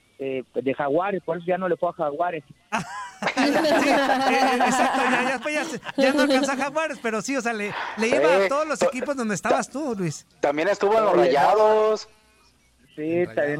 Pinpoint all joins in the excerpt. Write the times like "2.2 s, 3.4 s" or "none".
10.3 s